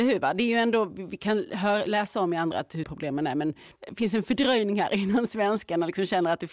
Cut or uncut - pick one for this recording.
cut